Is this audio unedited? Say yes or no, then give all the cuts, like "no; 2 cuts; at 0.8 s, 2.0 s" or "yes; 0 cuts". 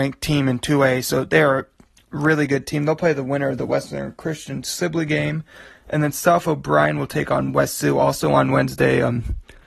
yes; 0 cuts